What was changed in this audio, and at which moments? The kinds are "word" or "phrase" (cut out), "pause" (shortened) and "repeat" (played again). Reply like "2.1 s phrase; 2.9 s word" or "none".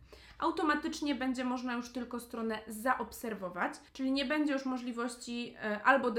3.9 s pause